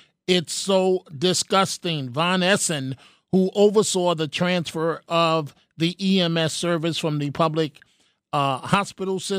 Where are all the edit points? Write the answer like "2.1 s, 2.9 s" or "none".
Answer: none